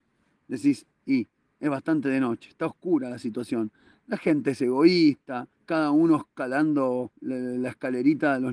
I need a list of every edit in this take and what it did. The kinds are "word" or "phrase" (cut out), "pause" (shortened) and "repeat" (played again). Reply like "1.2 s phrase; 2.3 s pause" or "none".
0.9 s pause; 5.6 s pause; 7.1 s pause